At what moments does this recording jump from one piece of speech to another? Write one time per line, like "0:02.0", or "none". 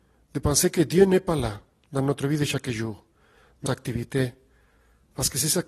0:03.7